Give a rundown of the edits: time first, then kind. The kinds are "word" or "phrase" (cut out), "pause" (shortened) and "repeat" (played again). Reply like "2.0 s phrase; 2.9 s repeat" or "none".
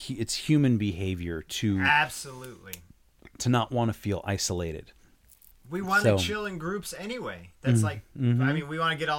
none